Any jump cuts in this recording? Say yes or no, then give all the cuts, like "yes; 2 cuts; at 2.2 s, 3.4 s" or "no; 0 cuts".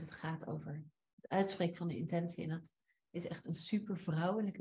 no; 0 cuts